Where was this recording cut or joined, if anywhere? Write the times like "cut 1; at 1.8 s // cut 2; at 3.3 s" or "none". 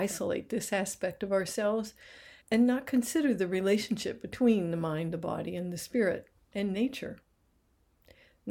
cut 1; at 2.4 s